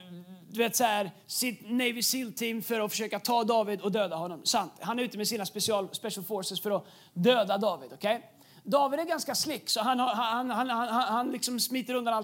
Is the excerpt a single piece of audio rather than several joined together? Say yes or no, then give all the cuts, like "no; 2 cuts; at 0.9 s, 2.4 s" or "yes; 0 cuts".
yes; 0 cuts